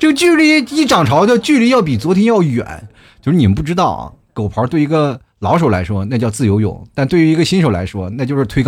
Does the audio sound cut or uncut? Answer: uncut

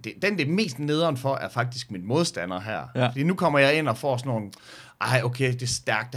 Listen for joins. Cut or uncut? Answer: uncut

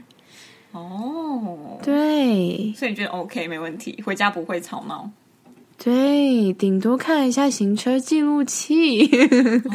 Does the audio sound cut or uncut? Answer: uncut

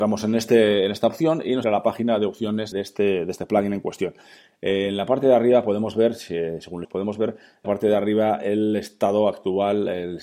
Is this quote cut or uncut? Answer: cut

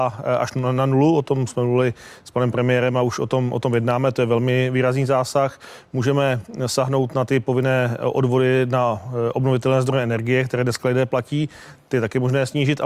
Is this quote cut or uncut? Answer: uncut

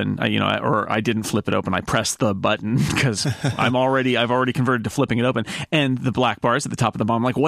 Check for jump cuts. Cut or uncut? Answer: uncut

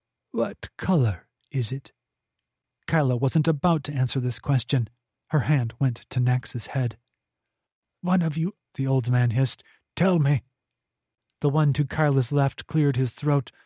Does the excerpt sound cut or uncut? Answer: cut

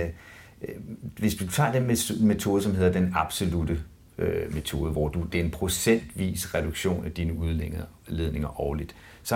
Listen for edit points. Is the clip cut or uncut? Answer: uncut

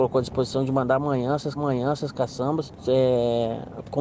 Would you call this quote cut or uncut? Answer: cut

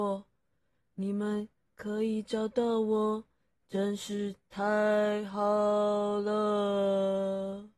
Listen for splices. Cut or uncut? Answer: uncut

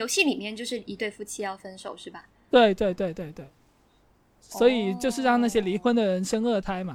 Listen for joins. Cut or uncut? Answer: uncut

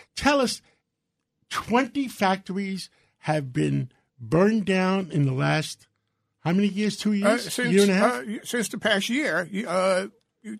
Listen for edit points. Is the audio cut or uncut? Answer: uncut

